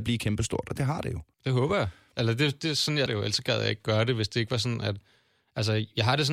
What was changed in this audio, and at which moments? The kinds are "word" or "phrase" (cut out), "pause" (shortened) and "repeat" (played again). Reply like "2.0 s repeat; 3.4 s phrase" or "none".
1.3 s pause; 2.6 s word; 3.1 s word